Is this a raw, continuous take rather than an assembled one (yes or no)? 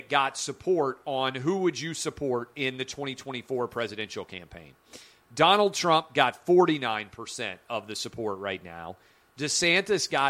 yes